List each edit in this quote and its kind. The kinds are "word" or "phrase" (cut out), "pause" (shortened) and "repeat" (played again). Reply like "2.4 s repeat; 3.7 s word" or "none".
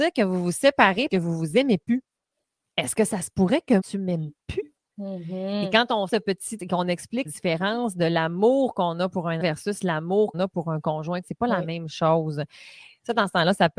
1.1 s word; 3.8 s word; 6.1 s word; 6.6 s word; 7.2 s word; 9.4 s word; 10.3 s word; 11.2 s word